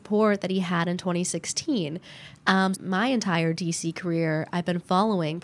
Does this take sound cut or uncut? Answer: cut